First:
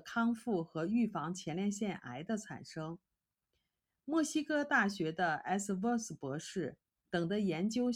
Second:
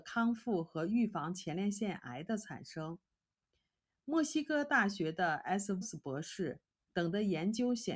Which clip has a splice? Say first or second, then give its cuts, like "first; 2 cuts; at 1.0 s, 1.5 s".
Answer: second; 1 cut; at 5.8 s